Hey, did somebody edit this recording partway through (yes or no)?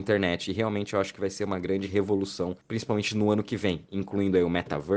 no